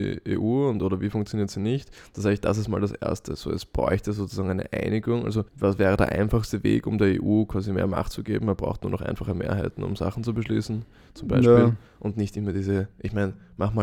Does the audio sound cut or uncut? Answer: cut